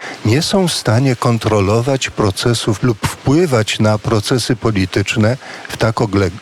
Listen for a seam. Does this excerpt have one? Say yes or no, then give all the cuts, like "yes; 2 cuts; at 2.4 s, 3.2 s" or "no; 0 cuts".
yes; 1 cut; at 2.8 s